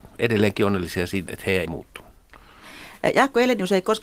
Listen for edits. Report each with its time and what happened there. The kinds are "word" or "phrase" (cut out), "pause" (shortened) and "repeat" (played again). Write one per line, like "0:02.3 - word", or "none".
0:01.3 - word
0:01.7 - word